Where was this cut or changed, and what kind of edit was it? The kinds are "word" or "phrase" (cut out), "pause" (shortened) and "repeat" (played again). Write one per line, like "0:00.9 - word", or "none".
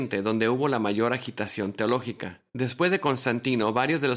0:02.5 - pause